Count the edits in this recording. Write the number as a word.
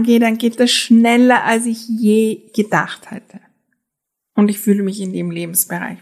one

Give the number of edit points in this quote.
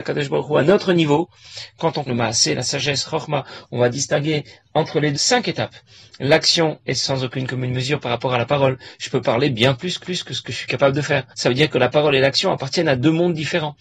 four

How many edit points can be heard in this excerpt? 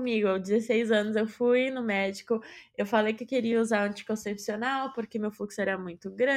zero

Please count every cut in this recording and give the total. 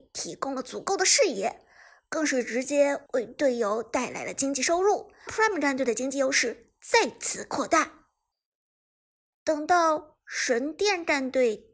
one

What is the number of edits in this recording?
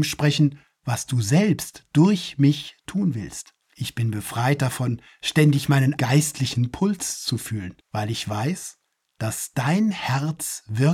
three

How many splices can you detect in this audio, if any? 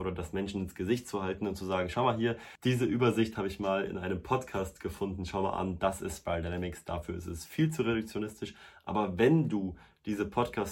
zero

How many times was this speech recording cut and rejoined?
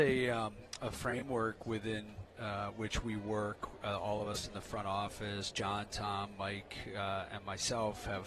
zero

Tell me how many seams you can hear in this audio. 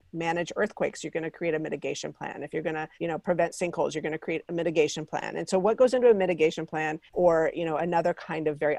two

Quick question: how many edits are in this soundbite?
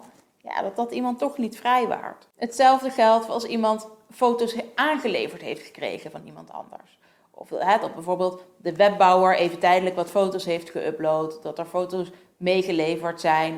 zero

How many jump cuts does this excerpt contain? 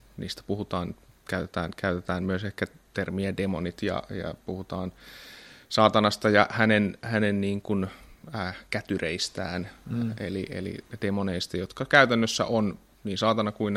zero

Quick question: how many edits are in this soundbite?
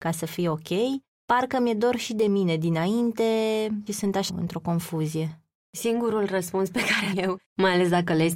three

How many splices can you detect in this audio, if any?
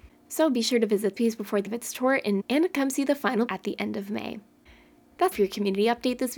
five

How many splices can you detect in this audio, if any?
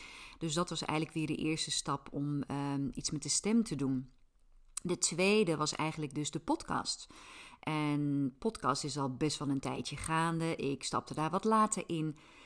zero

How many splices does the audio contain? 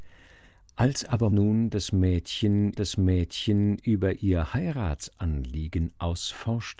two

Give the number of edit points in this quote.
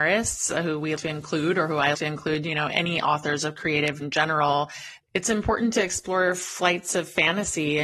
three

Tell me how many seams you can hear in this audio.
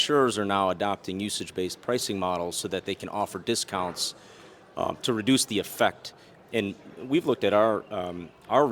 zero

